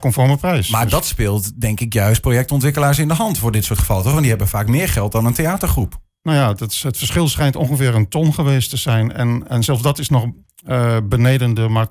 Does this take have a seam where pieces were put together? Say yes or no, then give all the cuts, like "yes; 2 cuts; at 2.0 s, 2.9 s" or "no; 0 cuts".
no; 0 cuts